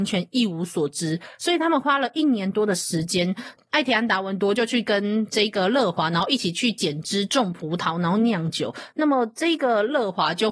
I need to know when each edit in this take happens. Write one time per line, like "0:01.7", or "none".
none